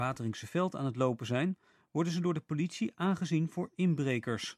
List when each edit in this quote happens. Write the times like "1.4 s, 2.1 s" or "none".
none